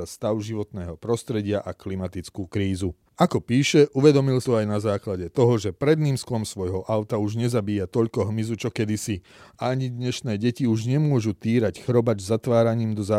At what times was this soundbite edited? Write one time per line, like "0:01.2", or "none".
0:03.1
0:04.4

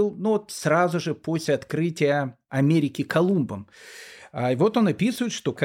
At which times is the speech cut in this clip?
none

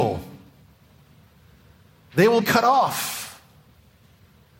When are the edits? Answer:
0:02.4

